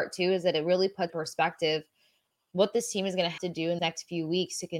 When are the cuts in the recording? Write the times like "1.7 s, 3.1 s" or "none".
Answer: 1.1 s, 3.4 s, 3.8 s